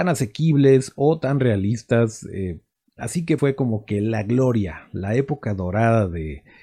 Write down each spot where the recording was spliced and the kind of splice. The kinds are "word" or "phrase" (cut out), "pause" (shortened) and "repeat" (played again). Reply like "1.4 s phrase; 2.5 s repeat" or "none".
3.4 s word